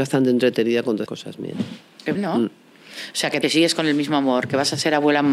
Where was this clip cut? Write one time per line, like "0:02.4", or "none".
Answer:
0:01.1
0:02.1
0:03.4